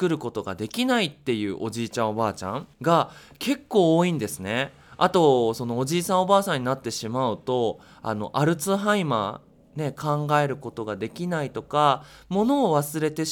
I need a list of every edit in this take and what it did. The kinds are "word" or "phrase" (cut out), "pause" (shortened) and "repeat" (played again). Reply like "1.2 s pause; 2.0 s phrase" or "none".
2.7 s pause